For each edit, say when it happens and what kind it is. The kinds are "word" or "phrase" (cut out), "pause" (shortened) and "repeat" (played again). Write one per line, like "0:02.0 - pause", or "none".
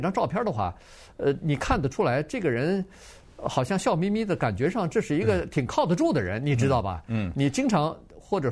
none

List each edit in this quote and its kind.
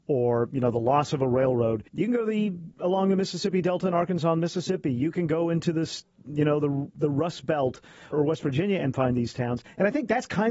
0:01.9 - pause
0:02.7 - pause
0:08.1 - word

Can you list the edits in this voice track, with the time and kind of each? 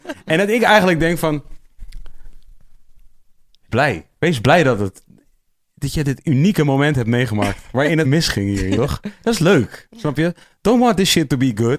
0:03.7 - word
0:08.0 - word
0:08.8 - word

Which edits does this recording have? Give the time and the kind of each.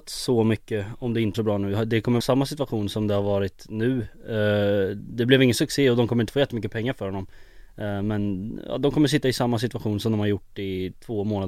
0:01.3 - word
0:02.2 - word

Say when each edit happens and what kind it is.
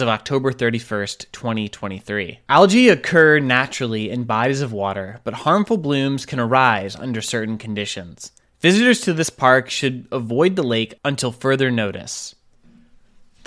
none

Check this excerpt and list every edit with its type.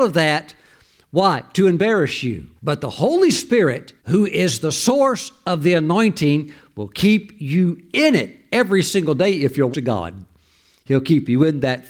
0:02.6 - pause
0:04.0 - pause
0:09.7 - phrase

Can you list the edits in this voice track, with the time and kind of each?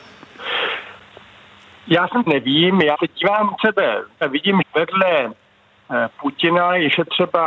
0:02.3 - phrase
0:02.9 - word
0:03.6 - word
0:04.2 - phrase
0:04.6 - word

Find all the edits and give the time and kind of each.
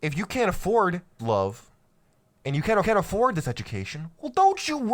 0:01.2 - word
0:02.8 - repeat

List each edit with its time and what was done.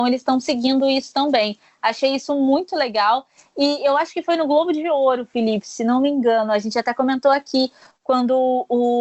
none

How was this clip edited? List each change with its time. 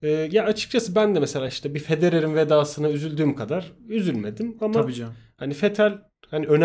none

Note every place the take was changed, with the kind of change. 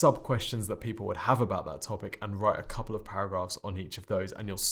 none

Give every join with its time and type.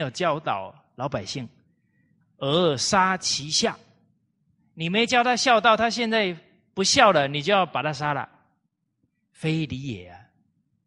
none

